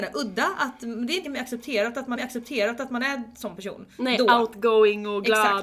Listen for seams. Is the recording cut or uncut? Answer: cut